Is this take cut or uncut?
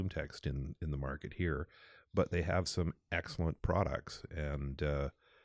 uncut